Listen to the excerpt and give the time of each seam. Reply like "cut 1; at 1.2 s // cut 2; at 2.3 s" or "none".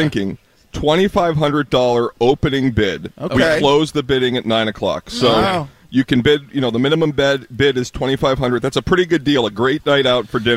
none